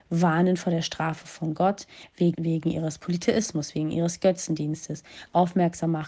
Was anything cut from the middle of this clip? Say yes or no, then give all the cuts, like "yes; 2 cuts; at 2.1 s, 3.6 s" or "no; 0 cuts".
yes; 1 cut; at 2.3 s